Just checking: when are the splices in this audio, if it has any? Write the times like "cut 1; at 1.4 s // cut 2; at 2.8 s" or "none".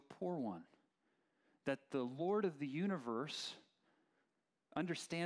none